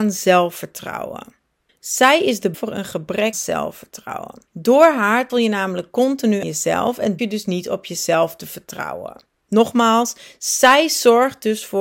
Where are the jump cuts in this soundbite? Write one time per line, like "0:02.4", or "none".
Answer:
0:01.7
0:02.5
0:03.3
0:04.5
0:05.3
0:06.4
0:07.2
0:09.3